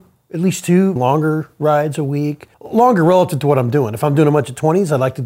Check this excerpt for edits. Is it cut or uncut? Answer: cut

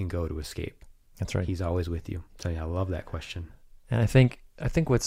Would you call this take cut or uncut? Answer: cut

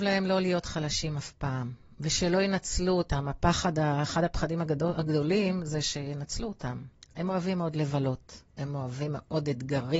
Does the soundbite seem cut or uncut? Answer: cut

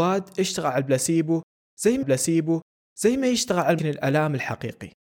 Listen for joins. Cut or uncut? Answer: cut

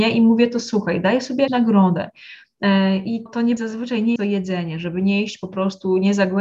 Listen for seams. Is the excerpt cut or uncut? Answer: cut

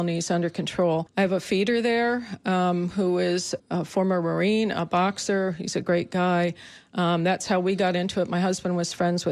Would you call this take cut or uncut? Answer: cut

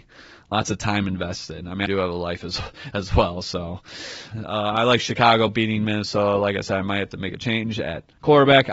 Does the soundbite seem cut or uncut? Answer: cut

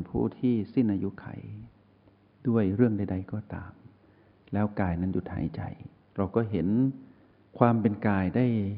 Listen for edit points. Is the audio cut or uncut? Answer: cut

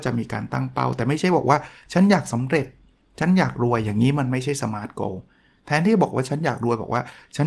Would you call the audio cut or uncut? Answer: uncut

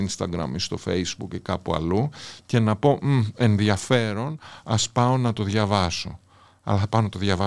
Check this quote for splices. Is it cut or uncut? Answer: uncut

